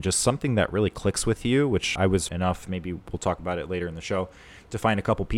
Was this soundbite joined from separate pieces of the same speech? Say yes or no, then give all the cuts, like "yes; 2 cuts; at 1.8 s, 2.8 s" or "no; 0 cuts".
yes; 2 cuts; at 2.0 s, 2.3 s